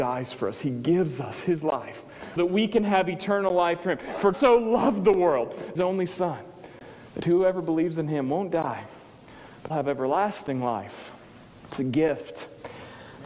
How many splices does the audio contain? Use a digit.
6